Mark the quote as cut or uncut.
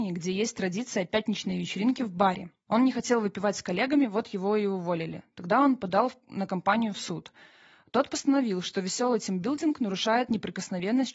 uncut